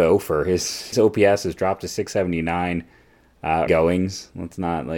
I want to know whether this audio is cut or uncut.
cut